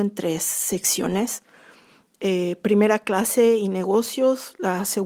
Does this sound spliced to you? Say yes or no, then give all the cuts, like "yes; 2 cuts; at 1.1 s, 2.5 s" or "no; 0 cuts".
no; 0 cuts